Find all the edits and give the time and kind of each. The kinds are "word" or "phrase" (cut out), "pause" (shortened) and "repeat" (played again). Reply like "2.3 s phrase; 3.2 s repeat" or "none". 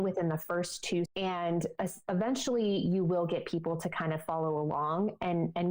1.1 s word